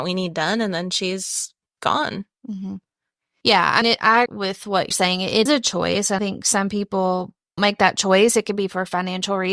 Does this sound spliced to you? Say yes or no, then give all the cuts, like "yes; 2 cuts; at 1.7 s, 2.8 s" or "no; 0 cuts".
yes; 6 cuts; at 3.8 s, 4.3 s, 4.9 s, 5.5 s, 6.2 s, 7.6 s